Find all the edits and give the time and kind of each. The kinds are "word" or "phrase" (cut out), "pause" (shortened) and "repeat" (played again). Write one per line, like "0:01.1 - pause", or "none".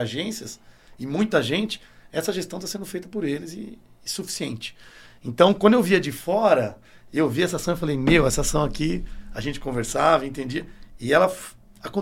none